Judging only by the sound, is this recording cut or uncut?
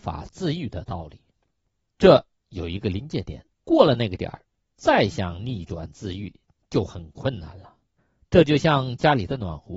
cut